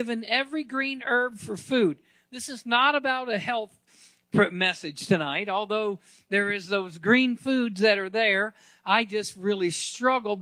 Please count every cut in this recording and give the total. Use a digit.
0